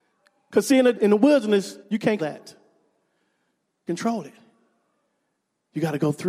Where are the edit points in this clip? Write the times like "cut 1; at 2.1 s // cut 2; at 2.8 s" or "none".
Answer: cut 1; at 0.9 s // cut 2; at 1.8 s // cut 3; at 2.2 s // cut 4; at 3.9 s